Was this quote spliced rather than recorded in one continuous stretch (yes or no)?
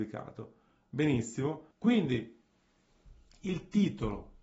yes